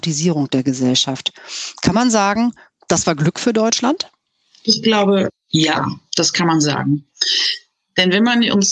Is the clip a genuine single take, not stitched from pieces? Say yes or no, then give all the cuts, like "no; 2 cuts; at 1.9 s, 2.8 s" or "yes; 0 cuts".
yes; 0 cuts